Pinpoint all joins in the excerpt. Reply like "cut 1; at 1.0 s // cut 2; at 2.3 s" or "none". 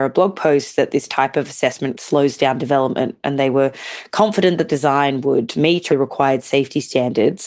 cut 1; at 1.9 s // cut 2; at 4.7 s // cut 3; at 5.9 s